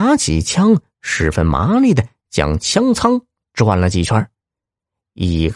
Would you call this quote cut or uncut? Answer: uncut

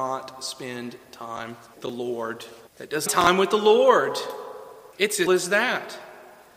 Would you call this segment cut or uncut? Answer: cut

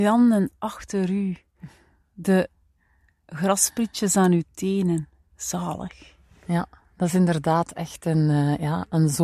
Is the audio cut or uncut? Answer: uncut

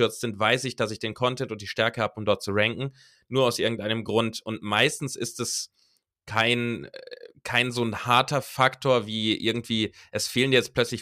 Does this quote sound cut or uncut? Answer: uncut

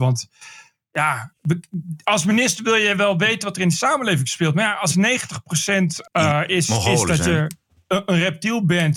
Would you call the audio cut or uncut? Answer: uncut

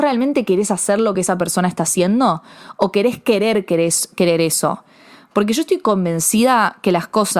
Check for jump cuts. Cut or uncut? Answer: uncut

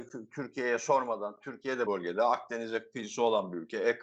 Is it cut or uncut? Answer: cut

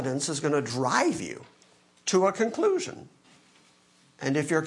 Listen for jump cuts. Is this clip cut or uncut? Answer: uncut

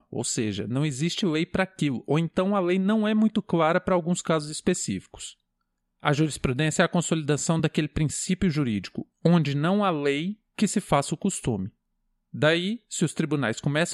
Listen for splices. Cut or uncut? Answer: uncut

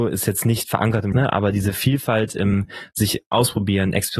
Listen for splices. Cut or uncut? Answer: cut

